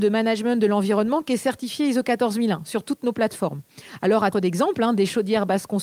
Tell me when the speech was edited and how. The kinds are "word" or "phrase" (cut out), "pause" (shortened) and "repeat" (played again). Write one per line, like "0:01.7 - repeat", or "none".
0:04.3 - word